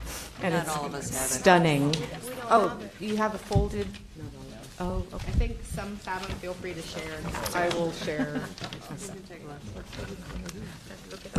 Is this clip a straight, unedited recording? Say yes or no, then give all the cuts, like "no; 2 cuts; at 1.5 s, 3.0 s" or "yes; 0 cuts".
no; 1 cut; at 6.0 s